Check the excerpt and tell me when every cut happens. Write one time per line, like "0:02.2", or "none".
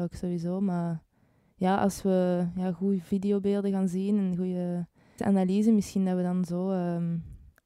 0:05.2